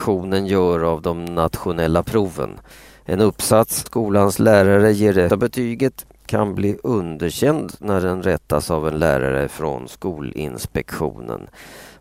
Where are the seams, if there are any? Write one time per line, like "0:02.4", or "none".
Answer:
0:02.7
0:03.9
0:05.3